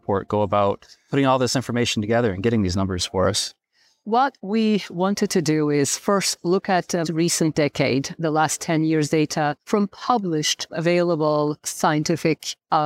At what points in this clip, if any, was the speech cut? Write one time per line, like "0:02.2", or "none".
0:07.0
0:09.6
0:10.7